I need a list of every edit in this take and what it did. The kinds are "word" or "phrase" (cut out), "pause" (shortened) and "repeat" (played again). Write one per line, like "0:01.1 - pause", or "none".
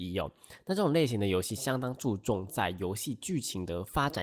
none